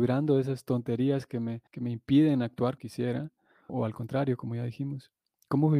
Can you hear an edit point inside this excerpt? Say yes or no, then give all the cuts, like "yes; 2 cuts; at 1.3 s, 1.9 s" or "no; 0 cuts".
yes; 3 cuts; at 1.7 s, 2.8 s, 3.7 s